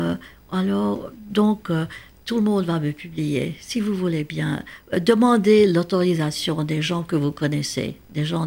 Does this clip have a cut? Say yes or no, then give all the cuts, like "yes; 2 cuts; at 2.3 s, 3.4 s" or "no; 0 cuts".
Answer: no; 0 cuts